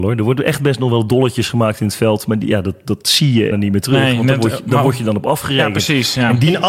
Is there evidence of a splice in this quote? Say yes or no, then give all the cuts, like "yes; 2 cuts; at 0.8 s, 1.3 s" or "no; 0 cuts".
yes; 1 cut; at 3.5 s